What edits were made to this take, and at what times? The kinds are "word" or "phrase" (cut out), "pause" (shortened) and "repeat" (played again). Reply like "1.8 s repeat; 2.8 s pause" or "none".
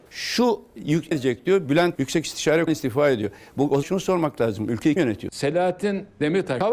1.1 s word; 2.0 s word; 2.7 s word; 3.8 s phrase; 5.0 s word